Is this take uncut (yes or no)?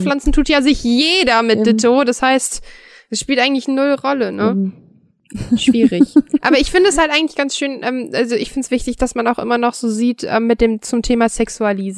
yes